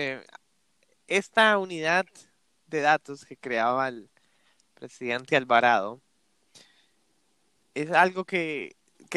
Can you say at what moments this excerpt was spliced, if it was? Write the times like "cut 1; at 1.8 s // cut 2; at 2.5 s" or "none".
none